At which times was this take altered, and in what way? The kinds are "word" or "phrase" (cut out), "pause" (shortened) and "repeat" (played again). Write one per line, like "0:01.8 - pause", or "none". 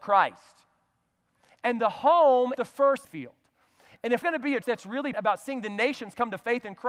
0:02.5 - word
0:03.0 - word
0:04.2 - word
0:04.6 - word
0:05.1 - word